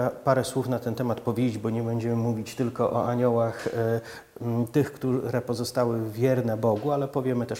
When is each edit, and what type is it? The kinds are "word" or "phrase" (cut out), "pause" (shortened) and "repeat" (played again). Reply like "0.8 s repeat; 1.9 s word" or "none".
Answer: none